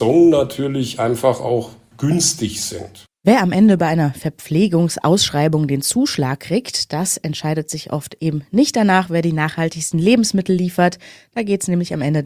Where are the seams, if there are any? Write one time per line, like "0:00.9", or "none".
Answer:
0:03.2